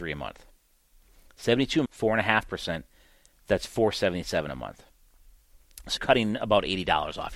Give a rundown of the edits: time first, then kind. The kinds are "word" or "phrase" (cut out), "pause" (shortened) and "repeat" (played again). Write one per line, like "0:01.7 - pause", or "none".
0:01.9 - word
0:06.0 - word